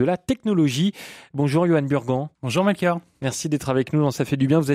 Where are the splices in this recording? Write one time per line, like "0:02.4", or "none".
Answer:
0:02.3